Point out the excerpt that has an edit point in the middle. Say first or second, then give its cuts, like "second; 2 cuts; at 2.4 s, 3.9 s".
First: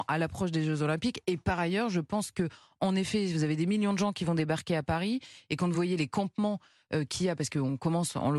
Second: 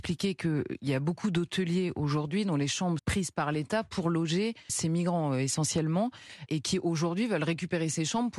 second; 3 cuts; at 3.0 s, 4.7 s, 6.5 s